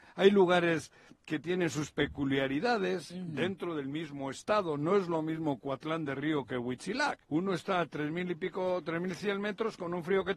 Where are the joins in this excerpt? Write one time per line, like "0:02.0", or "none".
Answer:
0:07.2